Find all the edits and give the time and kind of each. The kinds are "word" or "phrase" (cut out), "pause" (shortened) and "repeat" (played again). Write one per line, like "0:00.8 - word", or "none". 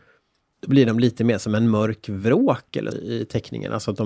0:02.9 - word

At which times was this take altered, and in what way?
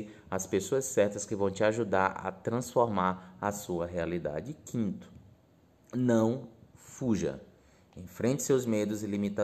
none

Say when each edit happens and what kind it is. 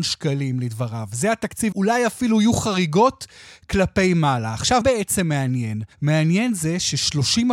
0:01.7 - word
0:04.8 - word
0:05.9 - pause

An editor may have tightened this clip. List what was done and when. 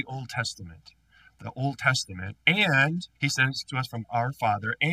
0:01.4 - phrase
0:03.1 - pause
0:03.7 - word
0:04.0 - word

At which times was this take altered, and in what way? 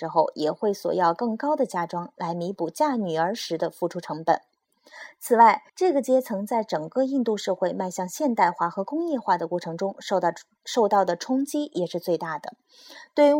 0:05.7 - pause

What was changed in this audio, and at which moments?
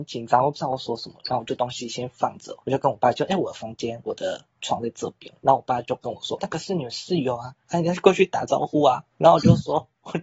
0:02.6 - pause
0:05.4 - pause
0:06.4 - phrase
0:09.1 - pause

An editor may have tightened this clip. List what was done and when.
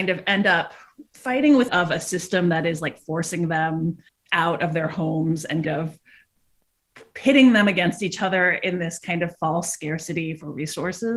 0:01.1 - pause
0:01.7 - phrase
0:04.1 - pause
0:05.6 - word

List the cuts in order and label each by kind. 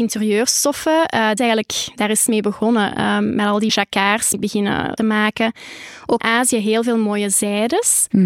0:01.4 - phrase
0:03.7 - word
0:04.3 - word
0:05.0 - phrase
0:06.2 - word

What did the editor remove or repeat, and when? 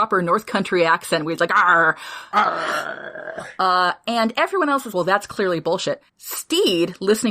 0:04.9 - word
0:06.1 - pause

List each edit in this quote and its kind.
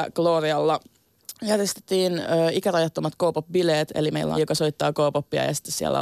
0:04.4 - phrase

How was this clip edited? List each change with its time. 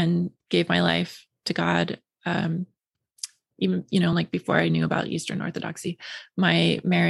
none

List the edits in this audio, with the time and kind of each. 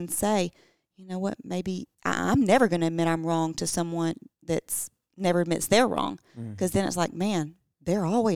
0:01.9 - pause

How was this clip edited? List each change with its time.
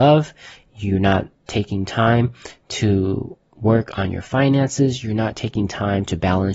0:01.4 - pause

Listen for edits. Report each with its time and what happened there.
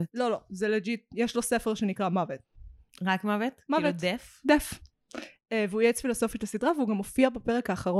none

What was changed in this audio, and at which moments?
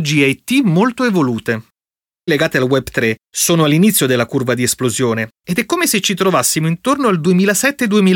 0:02.3 - word

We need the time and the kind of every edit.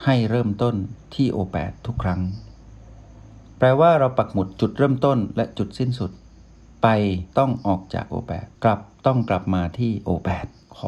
0:07.3 - pause
0:08.5 - pause

